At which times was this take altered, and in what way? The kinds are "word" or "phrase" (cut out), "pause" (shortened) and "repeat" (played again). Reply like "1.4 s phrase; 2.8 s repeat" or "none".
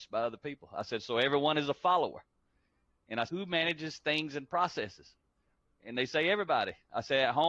3.3 s word